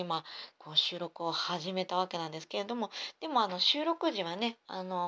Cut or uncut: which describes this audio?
uncut